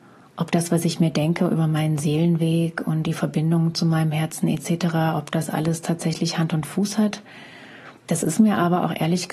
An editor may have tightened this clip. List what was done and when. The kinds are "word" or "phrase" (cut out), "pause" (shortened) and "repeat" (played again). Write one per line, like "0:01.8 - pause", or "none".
0:08.0 - pause